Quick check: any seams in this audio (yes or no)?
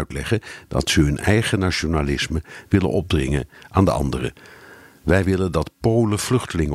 no